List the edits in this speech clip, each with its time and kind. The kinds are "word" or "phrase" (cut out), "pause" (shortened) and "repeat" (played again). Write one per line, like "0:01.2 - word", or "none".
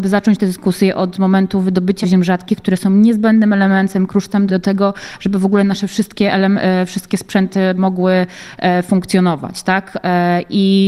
0:02.0 - word
0:04.5 - word